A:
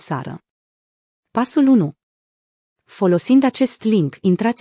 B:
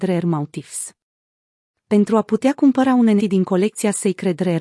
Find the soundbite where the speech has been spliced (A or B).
B